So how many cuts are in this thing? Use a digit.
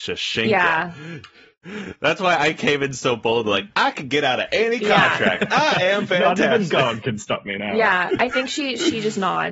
0